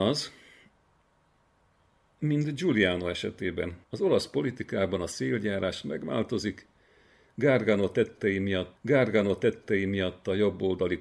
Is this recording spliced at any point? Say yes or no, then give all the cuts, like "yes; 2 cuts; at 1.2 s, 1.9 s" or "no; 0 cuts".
yes; 2 cuts; at 3.8 s, 8.8 s